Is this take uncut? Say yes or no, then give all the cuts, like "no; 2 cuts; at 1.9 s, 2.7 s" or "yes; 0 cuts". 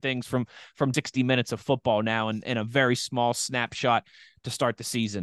no; 1 cut; at 0.9 s